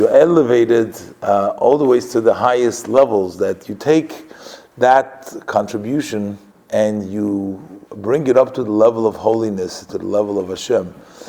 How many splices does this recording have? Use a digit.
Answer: 2